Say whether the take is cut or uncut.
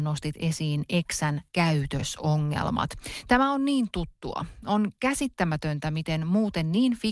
cut